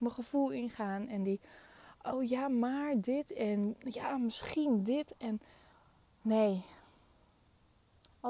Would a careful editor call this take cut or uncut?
uncut